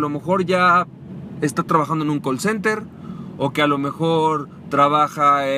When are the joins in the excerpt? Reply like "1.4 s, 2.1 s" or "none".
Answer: none